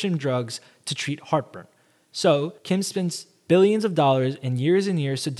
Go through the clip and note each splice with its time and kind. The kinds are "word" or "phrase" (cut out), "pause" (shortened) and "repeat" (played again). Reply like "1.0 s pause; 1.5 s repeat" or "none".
2.6 s pause